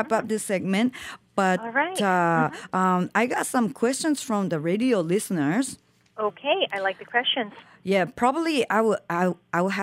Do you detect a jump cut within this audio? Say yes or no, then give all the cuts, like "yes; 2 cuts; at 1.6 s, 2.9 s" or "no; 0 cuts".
no; 0 cuts